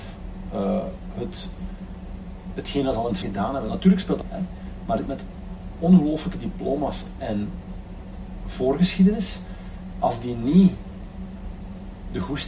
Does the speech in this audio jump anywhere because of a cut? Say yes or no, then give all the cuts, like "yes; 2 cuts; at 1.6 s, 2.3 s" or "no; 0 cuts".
yes; 4 cuts; at 3.2 s, 4.2 s, 5.1 s, 8.4 s